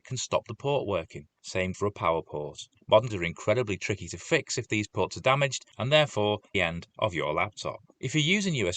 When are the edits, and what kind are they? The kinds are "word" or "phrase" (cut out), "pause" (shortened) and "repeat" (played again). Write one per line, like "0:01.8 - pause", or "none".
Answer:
0:01.7 - word
0:03.1 - word
0:06.5 - phrase